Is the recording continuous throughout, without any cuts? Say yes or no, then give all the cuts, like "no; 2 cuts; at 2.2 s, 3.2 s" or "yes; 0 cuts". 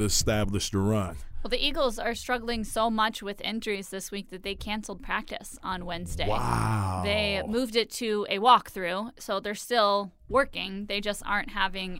yes; 0 cuts